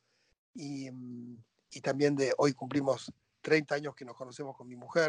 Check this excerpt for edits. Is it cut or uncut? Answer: uncut